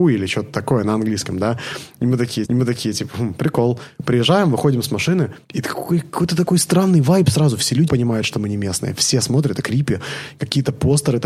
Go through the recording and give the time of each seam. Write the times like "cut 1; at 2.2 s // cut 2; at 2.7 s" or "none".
cut 1; at 2.5 s // cut 2; at 5.4 s // cut 3; at 7.9 s // cut 4; at 9.6 s